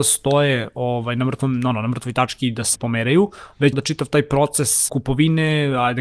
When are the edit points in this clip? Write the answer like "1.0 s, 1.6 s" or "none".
2.8 s, 3.7 s, 4.9 s